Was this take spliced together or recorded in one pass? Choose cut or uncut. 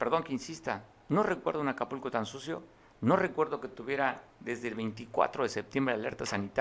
cut